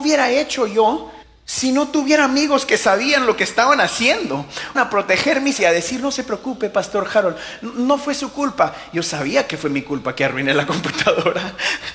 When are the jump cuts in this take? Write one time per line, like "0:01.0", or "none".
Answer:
0:01.2
0:04.7
0:05.6